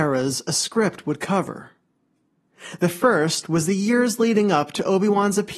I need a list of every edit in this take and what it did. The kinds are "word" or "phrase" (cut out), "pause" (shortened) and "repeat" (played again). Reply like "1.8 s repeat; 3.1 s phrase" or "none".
none